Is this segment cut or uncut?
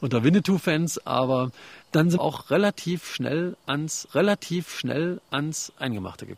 cut